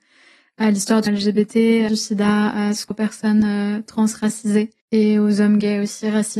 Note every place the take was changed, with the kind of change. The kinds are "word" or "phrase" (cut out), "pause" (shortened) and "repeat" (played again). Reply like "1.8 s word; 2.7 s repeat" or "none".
1.1 s word; 1.9 s phrase; 2.9 s word; 4.8 s pause